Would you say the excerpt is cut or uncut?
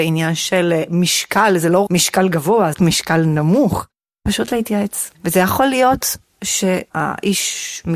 cut